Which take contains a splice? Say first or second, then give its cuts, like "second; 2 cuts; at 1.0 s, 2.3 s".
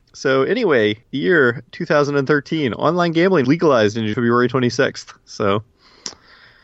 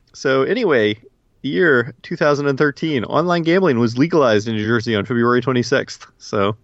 first; 3 cuts; at 1.0 s, 3.4 s, 4.1 s